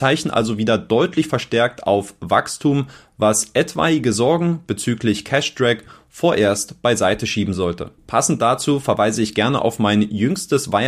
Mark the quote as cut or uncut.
uncut